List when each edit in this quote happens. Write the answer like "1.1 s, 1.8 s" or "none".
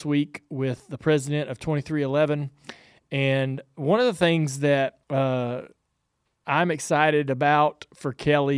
5.0 s